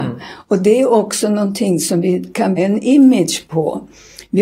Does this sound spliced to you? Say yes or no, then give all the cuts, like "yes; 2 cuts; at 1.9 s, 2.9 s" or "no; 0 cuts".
yes; 1 cut; at 2.6 s